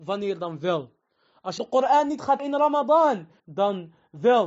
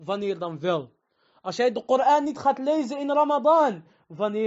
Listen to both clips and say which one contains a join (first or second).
first